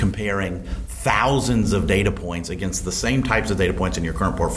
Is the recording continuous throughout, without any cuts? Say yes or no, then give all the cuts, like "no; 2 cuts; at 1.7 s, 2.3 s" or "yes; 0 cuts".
yes; 0 cuts